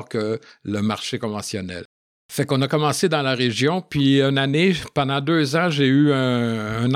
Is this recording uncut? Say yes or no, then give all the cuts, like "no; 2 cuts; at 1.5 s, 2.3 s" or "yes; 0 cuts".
yes; 0 cuts